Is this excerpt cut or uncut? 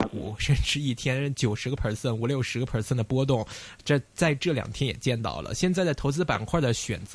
uncut